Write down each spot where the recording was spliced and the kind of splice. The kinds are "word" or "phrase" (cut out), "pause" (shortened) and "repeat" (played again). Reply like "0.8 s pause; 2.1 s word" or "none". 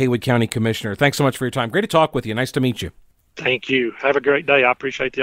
none